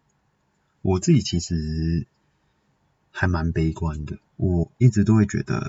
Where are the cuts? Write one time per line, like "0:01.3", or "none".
0:04.3